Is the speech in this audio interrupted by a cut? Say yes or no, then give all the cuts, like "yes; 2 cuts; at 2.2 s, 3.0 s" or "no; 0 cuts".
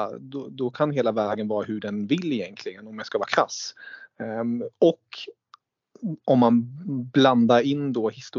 no; 0 cuts